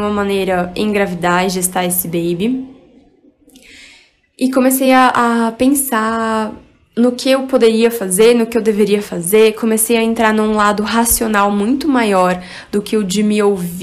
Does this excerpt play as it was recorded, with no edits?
yes; 0 cuts

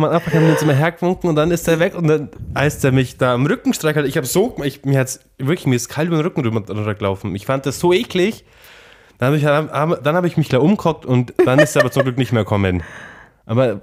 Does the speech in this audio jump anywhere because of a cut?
no; 0 cuts

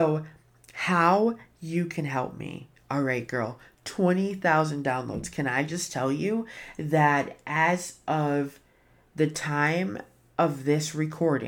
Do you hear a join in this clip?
no; 0 cuts

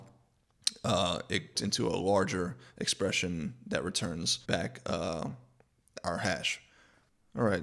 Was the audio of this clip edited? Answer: yes; 2 cuts; at 1.5 s, 4.4 s

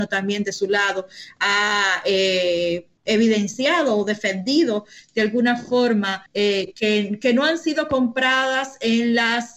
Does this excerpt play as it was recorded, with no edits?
no; 1 cut; at 6.3 s

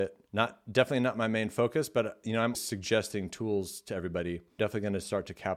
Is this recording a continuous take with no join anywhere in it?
no; 2 cuts; at 2.5 s, 4.6 s

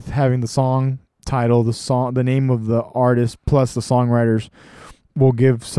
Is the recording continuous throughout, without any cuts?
no; 1 cut; at 1.0 s

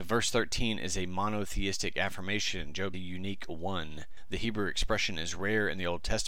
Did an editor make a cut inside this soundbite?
yes; 1 cut; at 2.9 s

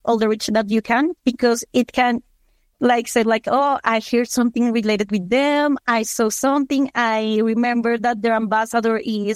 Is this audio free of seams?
no; 1 cut; at 1.2 s

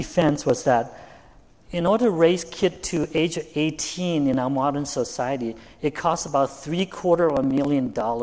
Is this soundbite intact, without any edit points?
yes; 0 cuts

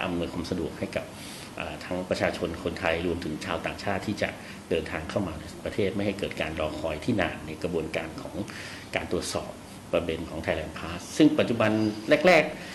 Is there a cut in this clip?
no; 0 cuts

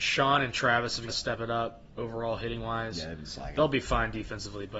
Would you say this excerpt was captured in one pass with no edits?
no; 1 cut; at 1.1 s

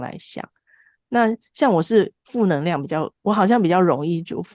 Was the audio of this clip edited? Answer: yes; 1 cut; at 2.2 s

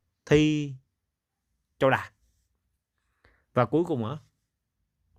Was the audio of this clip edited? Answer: no; 0 cuts

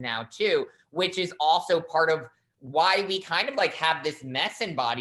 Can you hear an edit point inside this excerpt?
no; 0 cuts

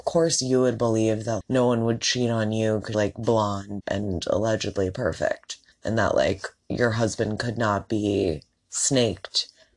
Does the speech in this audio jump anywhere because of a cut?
yes; 4 cuts; at 1.4 s, 2.9 s, 3.8 s, 5.7 s

